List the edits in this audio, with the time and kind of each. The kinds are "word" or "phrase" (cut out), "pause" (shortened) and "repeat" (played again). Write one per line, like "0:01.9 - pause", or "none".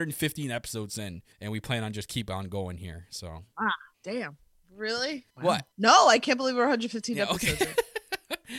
0:01.3 - pause
0:03.9 - pause
0:05.3 - pause
0:05.7 - pause

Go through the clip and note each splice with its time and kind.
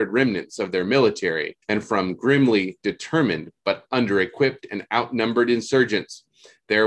0:01.6 - pause

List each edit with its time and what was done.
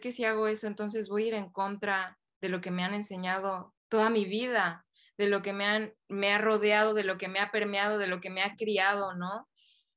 0:03.8 - pause

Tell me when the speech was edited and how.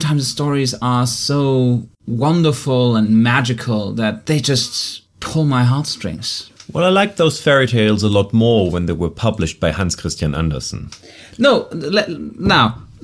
0:01.9 - pause
0:11.7 - word

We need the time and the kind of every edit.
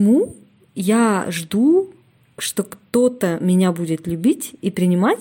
0:02.2 - pause

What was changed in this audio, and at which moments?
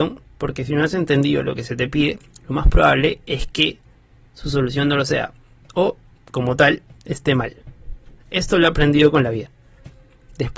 none

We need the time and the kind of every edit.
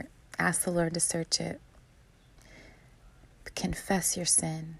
none

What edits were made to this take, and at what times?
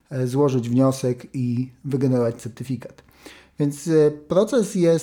none

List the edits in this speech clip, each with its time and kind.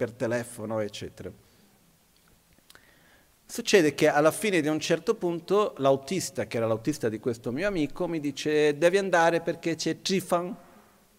none

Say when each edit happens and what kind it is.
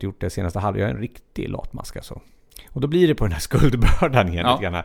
none

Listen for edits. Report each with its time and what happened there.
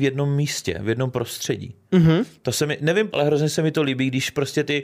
0:03.1 - word

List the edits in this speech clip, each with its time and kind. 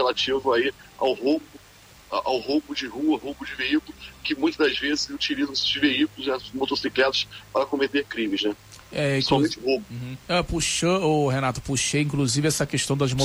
0:10.2 - pause

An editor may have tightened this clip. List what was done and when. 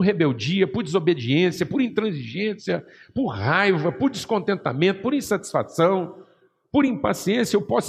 none

